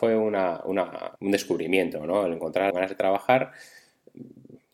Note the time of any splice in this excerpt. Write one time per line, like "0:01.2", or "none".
0:01.2
0:02.7